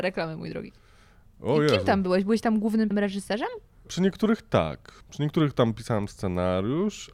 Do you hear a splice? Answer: yes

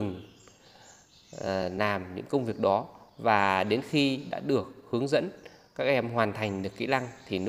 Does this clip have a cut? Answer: no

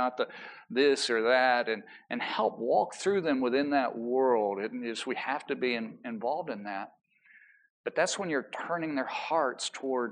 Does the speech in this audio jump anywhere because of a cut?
no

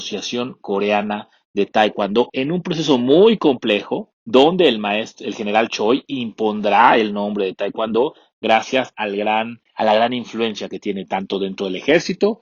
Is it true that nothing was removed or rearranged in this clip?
no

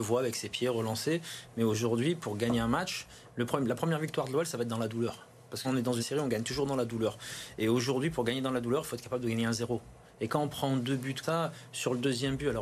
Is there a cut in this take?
yes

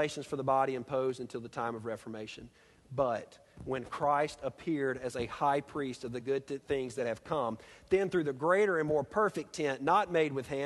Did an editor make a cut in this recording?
no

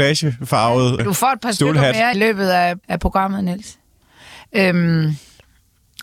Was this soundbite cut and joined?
yes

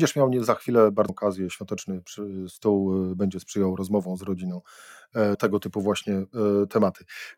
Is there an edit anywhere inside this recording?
yes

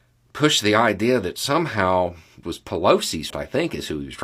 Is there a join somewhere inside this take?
yes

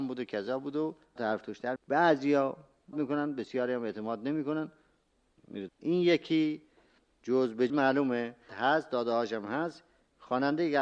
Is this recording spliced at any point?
yes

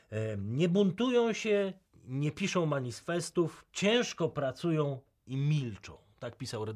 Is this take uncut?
no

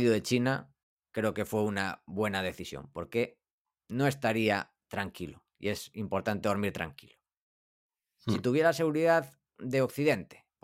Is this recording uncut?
yes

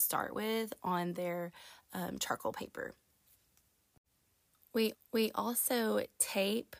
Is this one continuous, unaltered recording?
no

